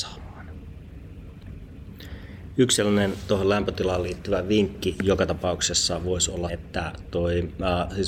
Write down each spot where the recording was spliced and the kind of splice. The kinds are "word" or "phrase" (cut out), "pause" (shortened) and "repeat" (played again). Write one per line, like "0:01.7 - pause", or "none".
0:06.5 - word